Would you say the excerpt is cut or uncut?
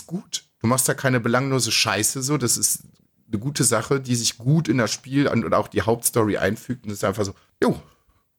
uncut